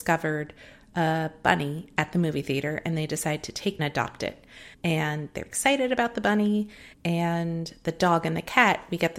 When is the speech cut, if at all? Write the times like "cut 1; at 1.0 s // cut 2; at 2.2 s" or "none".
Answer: cut 1; at 3.8 s // cut 2; at 4.7 s // cut 3; at 5.4 s // cut 4; at 6.9 s